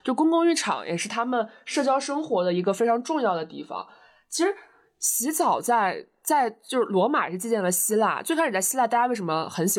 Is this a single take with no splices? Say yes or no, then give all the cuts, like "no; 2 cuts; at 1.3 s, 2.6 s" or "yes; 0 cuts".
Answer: yes; 0 cuts